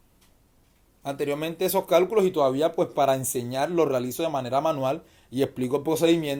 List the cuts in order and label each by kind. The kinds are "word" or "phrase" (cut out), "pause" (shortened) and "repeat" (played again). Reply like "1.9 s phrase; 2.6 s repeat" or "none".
none